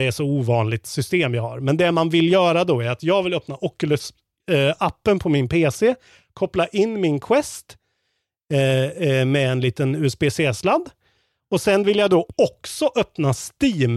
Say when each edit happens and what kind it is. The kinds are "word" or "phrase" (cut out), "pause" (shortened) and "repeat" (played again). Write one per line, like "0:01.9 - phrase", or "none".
none